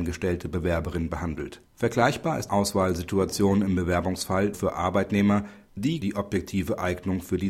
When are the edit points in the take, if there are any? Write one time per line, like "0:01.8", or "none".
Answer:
0:01.7
0:02.5
0:04.5
0:06.0